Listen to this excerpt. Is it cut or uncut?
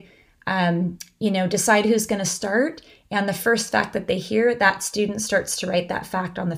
uncut